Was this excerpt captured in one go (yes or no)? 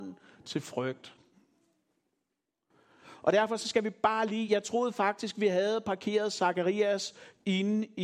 yes